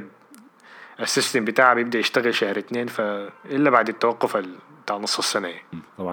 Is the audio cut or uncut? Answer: cut